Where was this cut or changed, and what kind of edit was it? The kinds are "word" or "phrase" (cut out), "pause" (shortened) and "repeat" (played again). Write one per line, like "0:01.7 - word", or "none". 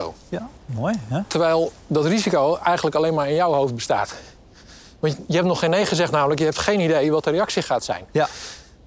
none